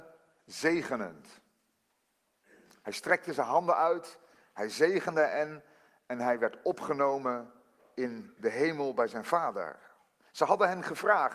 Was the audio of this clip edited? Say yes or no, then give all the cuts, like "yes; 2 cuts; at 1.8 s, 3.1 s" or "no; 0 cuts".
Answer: no; 0 cuts